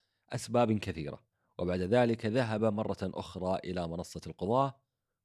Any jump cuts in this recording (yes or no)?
no